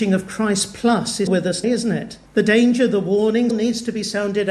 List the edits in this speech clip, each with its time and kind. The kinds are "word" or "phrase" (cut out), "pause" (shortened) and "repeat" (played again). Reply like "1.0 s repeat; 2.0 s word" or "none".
1.3 s word; 1.6 s word; 2.3 s pause; 3.5 s word